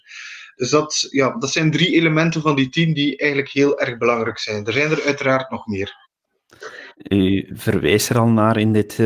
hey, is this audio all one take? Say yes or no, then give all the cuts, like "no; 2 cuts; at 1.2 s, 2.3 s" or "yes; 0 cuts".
yes; 0 cuts